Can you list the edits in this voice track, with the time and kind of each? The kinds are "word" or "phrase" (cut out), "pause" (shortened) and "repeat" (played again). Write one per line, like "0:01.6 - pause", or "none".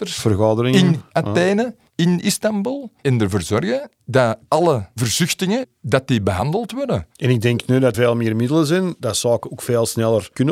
0:03.0 - pause
0:07.9 - word